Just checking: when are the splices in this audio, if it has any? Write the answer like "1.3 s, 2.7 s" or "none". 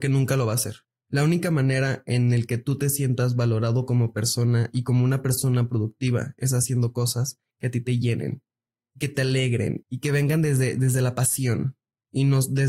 9.8 s